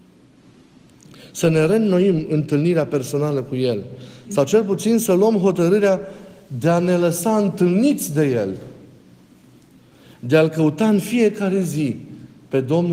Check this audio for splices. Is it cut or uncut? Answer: uncut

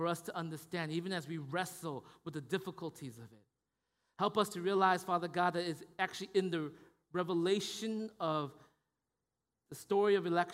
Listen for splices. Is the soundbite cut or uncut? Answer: uncut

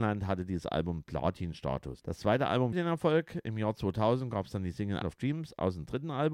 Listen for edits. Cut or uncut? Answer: cut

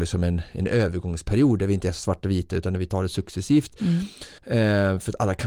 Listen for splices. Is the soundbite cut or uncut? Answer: cut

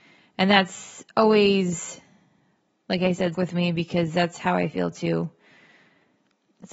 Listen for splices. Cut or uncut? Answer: cut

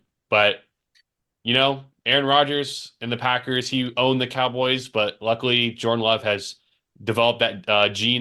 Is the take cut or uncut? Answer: uncut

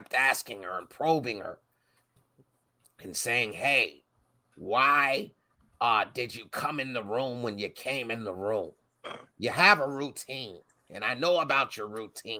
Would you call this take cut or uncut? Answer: uncut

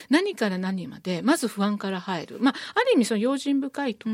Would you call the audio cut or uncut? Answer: uncut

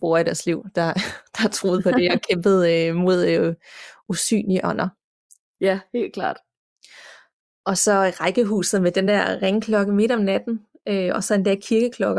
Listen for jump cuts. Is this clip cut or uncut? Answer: uncut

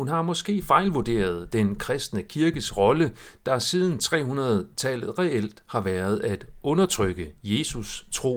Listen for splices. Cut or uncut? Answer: uncut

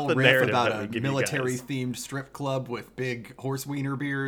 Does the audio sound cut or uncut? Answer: uncut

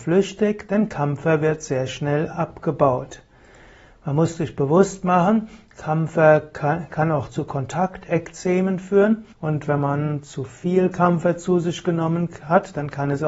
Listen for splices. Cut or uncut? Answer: cut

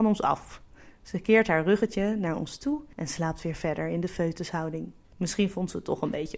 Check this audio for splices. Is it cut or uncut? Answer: uncut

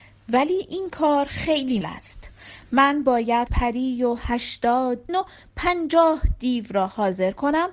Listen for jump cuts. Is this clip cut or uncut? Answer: cut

